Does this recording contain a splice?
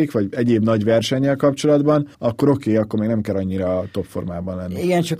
yes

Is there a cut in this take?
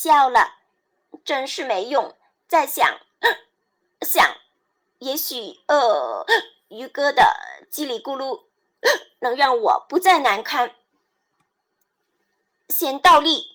no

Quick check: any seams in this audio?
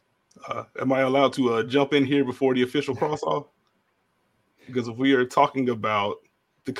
no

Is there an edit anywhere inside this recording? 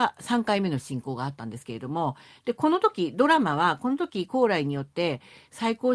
no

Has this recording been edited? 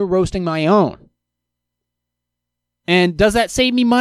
no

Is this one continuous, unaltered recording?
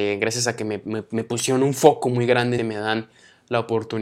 no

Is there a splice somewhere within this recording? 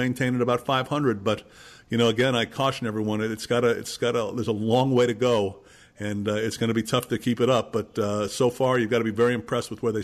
no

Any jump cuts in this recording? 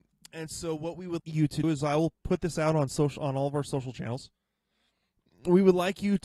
yes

